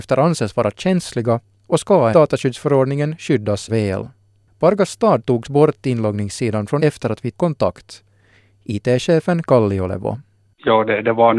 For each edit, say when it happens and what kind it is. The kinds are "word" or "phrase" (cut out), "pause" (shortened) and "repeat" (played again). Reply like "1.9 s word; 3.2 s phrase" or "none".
2.1 s word; 3.7 s word; 5.4 s word; 6.8 s word; 7.3 s word; 9.4 s word